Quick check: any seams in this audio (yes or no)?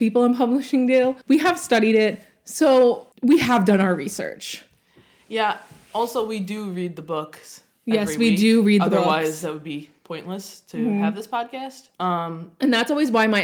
yes